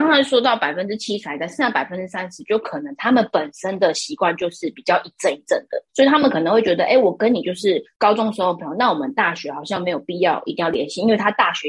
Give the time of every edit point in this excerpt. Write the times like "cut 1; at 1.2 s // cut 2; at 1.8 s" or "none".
cut 1; at 5.9 s // cut 2; at 7.9 s